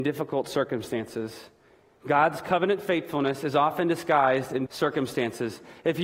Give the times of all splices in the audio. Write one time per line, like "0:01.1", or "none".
0:04.7